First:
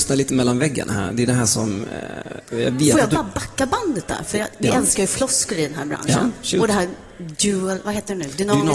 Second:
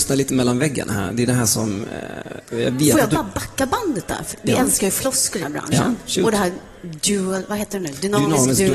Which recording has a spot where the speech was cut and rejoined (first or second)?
second